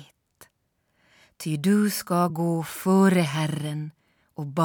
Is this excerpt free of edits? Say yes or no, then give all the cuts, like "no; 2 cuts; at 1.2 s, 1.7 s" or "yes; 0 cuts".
yes; 0 cuts